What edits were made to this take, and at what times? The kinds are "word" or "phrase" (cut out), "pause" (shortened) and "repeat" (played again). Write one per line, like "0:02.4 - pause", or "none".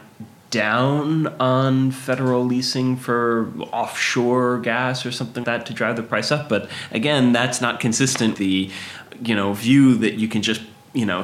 0:05.4 - word
0:08.3 - word